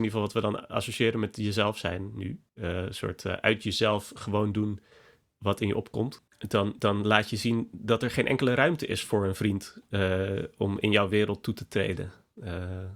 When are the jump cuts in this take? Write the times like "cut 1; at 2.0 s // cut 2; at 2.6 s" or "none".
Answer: cut 1; at 2.5 s // cut 2; at 6.3 s